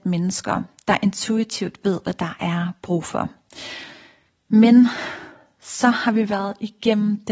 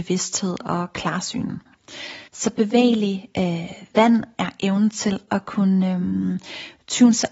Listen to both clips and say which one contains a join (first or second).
second